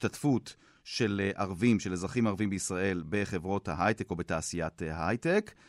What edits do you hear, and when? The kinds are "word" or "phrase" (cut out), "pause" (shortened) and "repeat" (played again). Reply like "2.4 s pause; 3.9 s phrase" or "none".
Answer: none